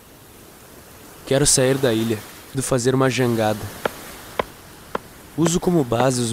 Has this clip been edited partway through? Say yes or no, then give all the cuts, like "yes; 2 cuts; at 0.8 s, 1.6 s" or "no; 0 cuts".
yes; 1 cut; at 2.5 s